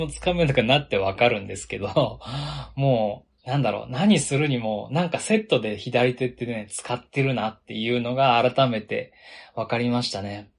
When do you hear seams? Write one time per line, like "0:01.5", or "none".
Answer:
0:03.4